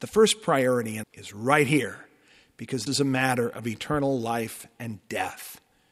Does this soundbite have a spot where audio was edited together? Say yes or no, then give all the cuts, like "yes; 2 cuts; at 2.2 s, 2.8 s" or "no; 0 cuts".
yes; 2 cuts; at 1.0 s, 2.9 s